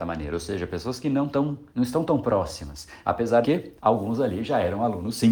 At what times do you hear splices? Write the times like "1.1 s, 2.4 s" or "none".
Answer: 1.7 s, 3.4 s, 3.8 s